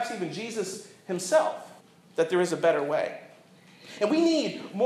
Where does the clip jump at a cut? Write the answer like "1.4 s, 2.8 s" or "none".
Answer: 1.8 s

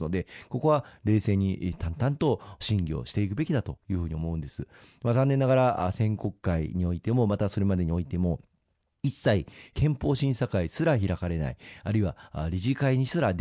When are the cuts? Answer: none

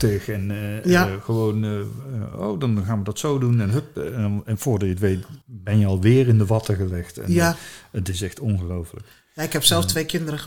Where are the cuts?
5.4 s

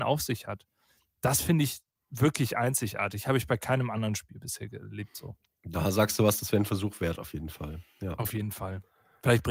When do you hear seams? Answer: none

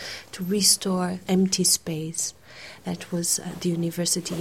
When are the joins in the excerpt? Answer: 1.2 s

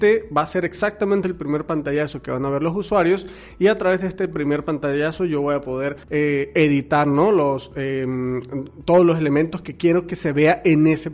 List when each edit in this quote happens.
6.0 s

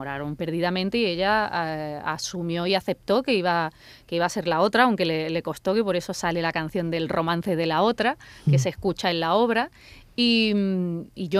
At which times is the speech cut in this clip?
none

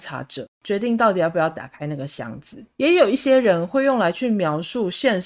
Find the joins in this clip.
2.7 s

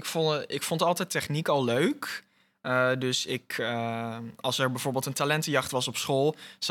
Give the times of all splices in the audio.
none

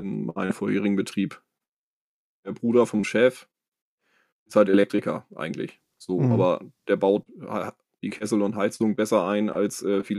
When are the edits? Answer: 7.9 s

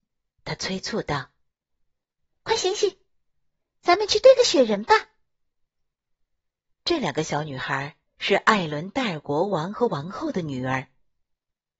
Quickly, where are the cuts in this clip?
8.1 s

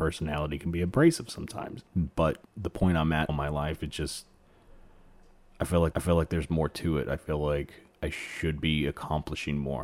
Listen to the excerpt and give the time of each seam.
2.5 s, 3.3 s, 5.9 s, 7.9 s

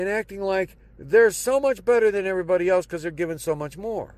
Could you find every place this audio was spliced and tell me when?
none

